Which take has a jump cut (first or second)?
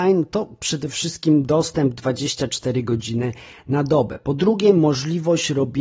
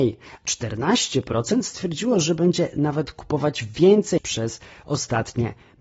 second